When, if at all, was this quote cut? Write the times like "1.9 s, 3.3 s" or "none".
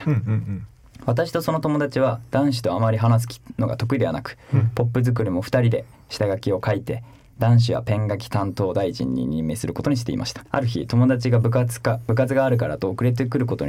10.5 s